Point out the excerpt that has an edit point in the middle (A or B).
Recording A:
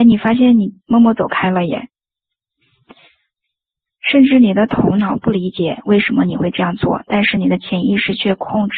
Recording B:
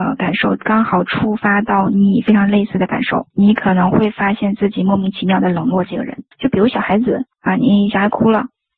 B